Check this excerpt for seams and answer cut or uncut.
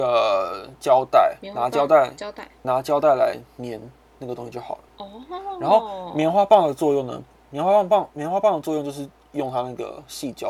cut